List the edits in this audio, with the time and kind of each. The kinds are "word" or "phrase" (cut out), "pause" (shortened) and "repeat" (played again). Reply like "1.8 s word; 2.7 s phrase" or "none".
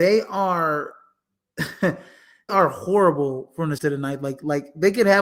2.5 s word; 3.8 s word